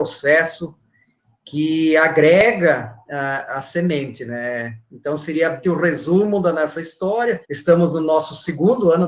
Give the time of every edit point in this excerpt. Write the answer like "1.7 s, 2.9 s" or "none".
5.6 s, 7.4 s